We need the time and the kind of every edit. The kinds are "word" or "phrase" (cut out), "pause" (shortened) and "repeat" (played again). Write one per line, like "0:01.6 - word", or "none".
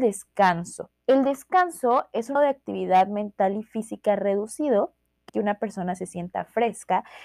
0:01.0 - pause
0:02.4 - word
0:05.3 - word